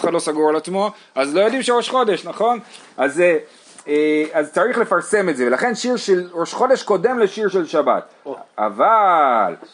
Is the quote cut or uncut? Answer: uncut